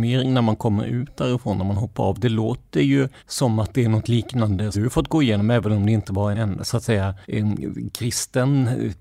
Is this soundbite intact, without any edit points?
no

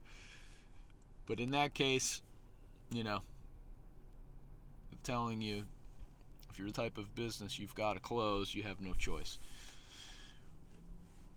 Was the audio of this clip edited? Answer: yes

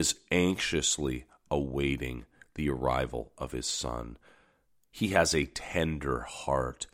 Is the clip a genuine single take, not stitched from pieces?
yes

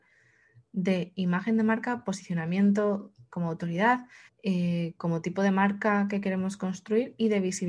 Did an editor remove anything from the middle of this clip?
yes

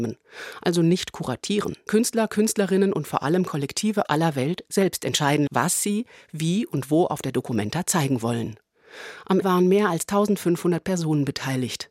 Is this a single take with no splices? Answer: no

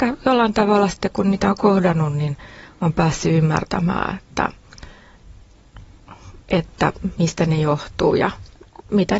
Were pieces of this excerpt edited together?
yes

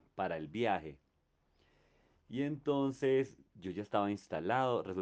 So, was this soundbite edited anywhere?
no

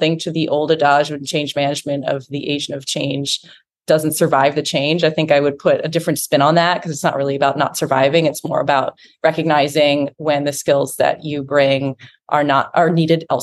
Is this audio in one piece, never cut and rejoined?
yes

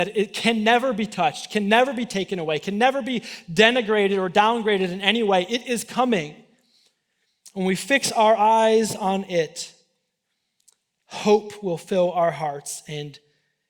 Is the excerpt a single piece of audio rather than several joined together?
yes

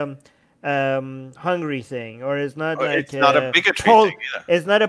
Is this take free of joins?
yes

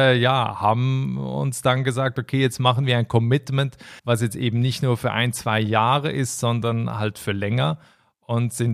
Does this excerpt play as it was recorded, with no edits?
no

